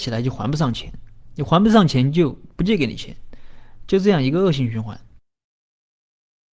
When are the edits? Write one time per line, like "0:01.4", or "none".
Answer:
0:02.5